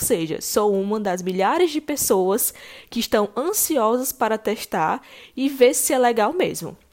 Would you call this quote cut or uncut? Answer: uncut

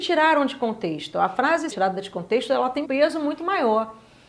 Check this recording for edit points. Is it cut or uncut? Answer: cut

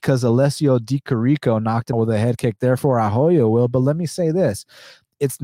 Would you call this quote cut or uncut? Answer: cut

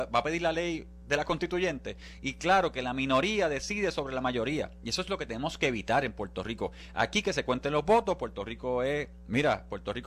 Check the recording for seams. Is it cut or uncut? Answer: uncut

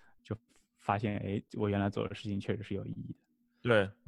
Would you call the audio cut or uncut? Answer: cut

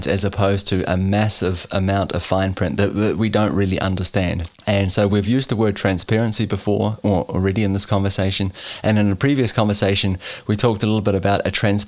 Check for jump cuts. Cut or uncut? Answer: cut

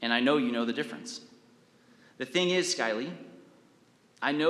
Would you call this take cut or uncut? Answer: uncut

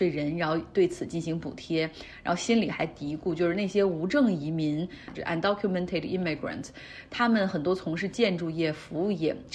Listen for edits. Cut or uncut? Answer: cut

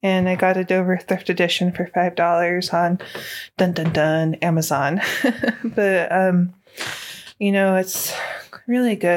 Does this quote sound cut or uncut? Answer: uncut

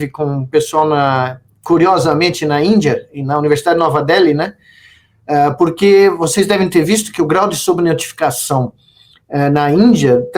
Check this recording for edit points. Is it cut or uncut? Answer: uncut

